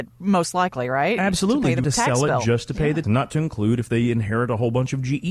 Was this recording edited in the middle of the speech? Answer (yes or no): yes